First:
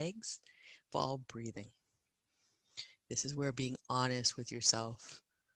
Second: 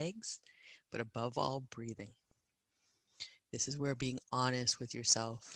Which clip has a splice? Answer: first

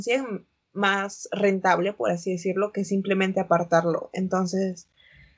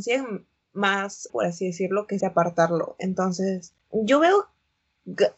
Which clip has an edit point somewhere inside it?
second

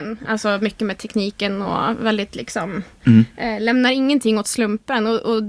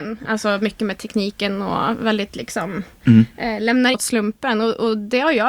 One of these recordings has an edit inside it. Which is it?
second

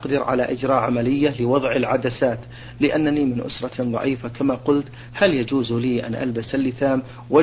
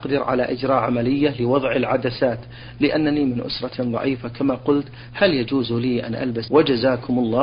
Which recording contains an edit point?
second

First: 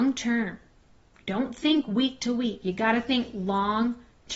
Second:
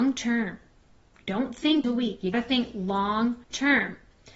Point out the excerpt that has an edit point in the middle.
second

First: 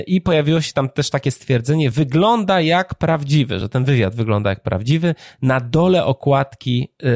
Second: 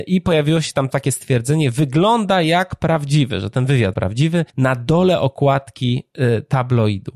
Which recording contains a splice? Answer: second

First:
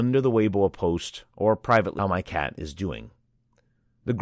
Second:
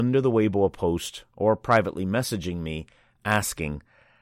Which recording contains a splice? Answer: first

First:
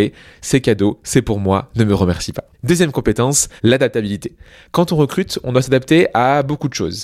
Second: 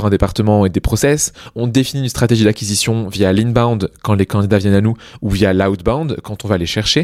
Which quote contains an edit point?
first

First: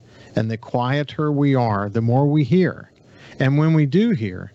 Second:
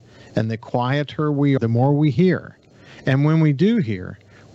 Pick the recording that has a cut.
second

